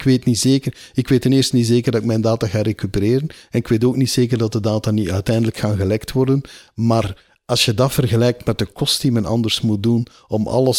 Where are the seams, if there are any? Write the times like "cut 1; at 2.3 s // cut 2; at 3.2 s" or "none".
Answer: none